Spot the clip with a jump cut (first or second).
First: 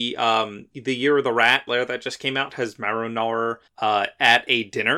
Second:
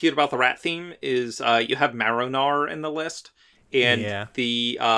first